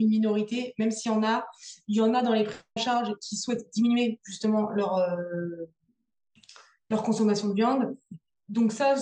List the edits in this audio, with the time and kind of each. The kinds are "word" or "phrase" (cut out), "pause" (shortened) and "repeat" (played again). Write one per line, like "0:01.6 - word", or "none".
0:02.8 - word